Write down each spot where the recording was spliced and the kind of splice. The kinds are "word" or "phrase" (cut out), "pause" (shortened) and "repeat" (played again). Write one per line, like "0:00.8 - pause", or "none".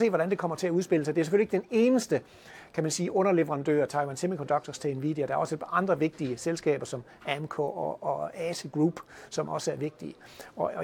none